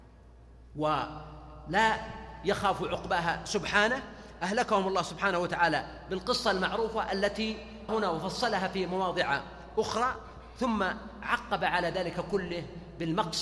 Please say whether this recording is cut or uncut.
cut